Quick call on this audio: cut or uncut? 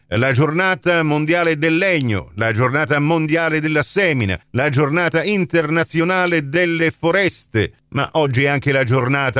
cut